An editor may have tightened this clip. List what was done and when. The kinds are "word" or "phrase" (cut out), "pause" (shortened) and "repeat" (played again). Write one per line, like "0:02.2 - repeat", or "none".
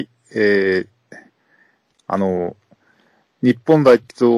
none